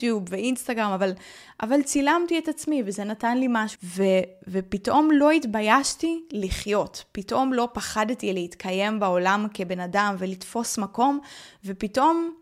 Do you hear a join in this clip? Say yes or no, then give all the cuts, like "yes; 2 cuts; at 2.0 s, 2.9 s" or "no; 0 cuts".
yes; 1 cut; at 3.7 s